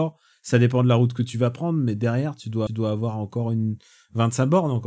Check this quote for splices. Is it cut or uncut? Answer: cut